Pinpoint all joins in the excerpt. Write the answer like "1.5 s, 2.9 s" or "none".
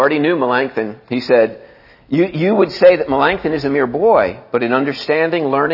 none